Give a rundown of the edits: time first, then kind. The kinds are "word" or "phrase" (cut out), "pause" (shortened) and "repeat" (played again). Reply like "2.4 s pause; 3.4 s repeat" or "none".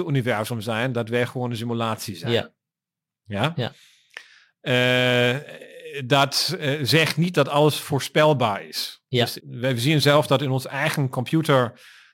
9.4 s word